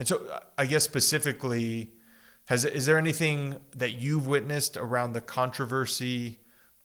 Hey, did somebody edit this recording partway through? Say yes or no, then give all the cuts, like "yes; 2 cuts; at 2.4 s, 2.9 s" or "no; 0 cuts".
no; 0 cuts